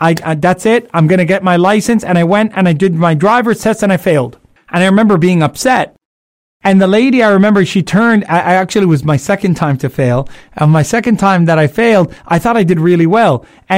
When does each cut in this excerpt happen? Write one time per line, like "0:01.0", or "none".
none